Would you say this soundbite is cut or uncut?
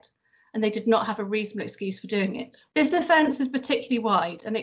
cut